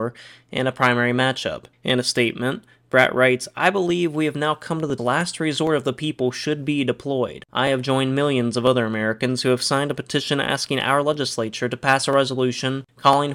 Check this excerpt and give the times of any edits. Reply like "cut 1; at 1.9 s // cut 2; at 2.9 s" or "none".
cut 1; at 1.7 s // cut 2; at 5.0 s

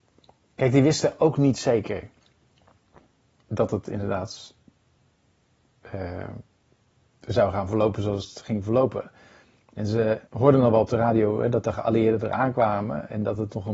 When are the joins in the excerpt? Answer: cut 1; at 10.3 s

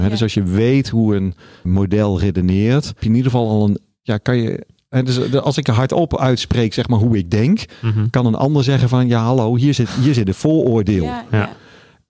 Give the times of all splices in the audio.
cut 1; at 1.6 s // cut 2; at 3.0 s

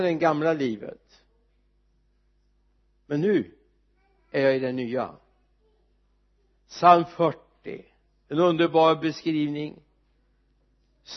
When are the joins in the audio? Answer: none

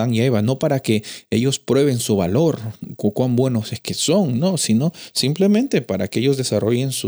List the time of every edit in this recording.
none

